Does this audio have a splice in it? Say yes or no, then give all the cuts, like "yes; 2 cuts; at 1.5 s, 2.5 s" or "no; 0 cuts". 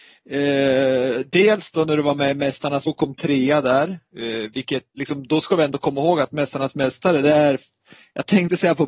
yes; 1 cut; at 2.9 s